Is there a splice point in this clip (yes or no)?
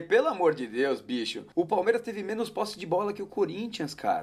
yes